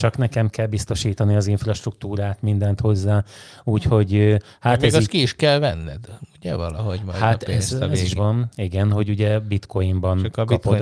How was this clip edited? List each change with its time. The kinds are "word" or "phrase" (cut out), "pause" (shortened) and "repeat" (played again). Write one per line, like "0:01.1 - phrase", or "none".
0:08.2 - word